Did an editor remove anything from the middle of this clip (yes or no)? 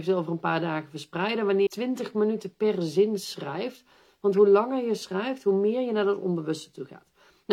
yes